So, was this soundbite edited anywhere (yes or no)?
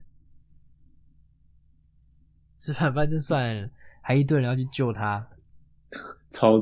no